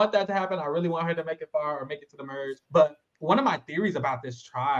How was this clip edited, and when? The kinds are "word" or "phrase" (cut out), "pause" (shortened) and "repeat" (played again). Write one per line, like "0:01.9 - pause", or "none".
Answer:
0:02.6 - pause